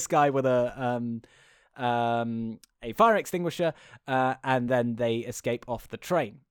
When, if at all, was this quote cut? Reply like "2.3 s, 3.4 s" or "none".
none